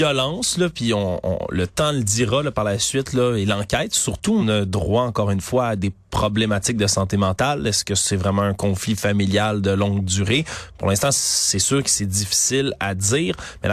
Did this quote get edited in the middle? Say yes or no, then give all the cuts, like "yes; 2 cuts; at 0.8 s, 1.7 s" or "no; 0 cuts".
yes; 1 cut; at 4.4 s